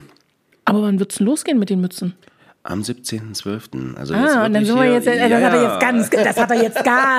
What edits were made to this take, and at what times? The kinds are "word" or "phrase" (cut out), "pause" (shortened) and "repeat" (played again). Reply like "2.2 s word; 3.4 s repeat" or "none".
none